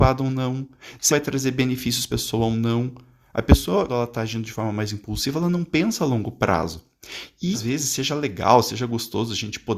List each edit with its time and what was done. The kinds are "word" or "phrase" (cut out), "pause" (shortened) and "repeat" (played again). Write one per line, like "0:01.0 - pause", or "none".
0:01.1 - word
0:02.1 - word
0:03.9 - word
0:07.5 - word